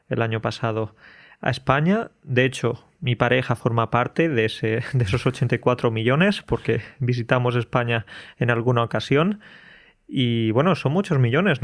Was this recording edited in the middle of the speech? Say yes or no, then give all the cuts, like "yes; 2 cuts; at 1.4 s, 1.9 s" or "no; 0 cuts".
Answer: no; 0 cuts